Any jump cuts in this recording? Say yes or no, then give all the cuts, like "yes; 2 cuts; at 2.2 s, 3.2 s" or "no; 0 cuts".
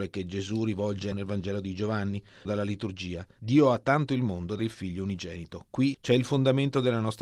yes; 5 cuts; at 1.1 s, 2.4 s, 4.1 s, 4.6 s, 5.9 s